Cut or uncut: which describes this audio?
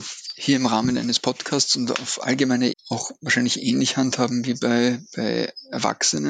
cut